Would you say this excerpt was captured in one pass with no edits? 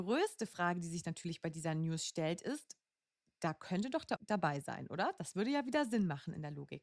no; 1 cut; at 4.2 s

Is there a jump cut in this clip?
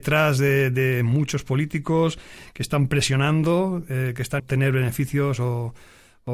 yes; 1 cut; at 4.4 s

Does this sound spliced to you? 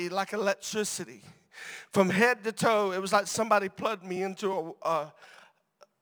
no; 0 cuts

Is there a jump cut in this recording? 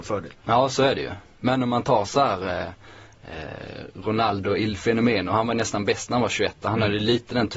no; 0 cuts

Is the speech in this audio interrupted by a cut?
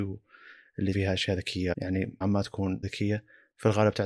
yes; 4 cuts; at 0.9 s, 1.7 s, 2.2 s, 2.8 s

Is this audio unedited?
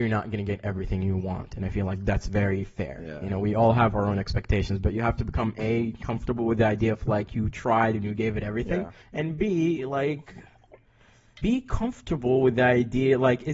no; 2 cuts; at 9.0 s, 11.4 s

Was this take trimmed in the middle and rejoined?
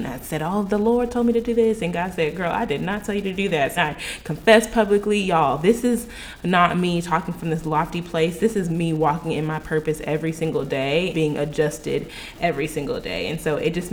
yes; 2 cuts; at 3.8 s, 11.1 s

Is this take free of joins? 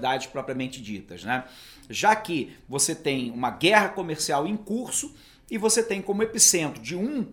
yes; 0 cuts

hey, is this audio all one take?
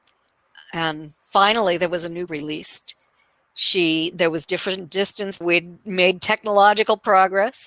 no; 3 cuts; at 1.2 s, 2.3 s, 5.4 s

